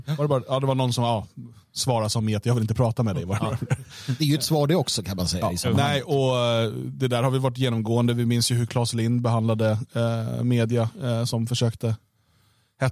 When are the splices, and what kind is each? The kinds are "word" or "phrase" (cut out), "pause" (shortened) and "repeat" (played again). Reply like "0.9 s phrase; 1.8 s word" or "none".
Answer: none